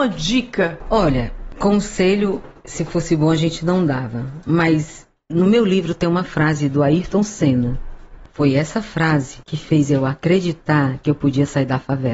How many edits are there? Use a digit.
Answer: 1